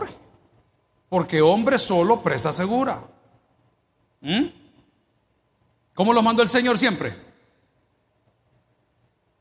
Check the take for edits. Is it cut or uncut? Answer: uncut